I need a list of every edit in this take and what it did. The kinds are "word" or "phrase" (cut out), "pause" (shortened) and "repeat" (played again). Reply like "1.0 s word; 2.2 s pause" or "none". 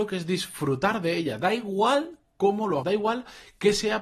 2.8 s word